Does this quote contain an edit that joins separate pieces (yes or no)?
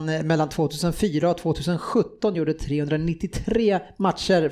no